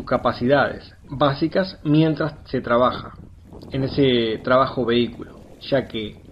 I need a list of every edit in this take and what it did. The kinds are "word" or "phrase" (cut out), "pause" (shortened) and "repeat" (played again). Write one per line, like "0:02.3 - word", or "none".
none